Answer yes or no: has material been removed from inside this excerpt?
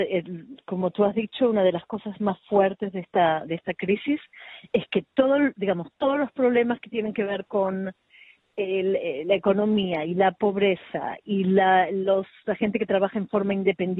no